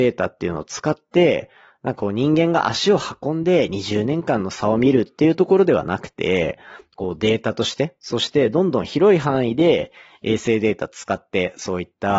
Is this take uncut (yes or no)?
yes